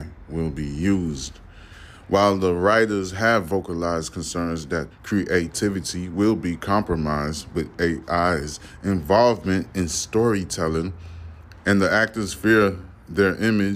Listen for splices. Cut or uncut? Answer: cut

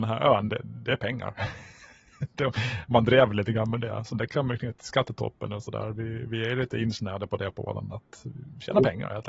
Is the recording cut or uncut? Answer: uncut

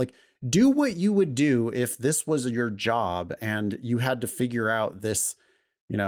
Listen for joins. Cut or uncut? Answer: uncut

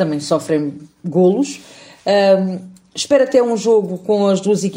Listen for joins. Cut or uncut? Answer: uncut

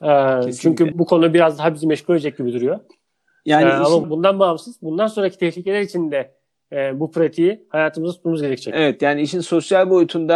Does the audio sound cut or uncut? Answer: cut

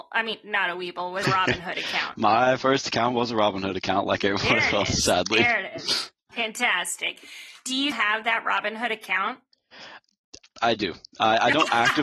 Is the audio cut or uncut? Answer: cut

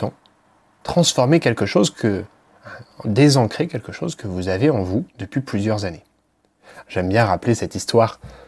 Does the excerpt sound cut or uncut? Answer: uncut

